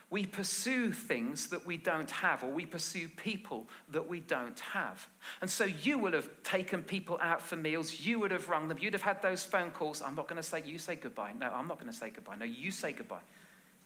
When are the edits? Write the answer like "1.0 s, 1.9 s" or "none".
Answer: none